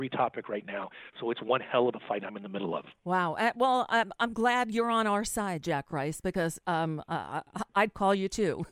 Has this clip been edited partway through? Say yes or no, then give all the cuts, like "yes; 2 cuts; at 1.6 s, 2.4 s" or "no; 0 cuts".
no; 0 cuts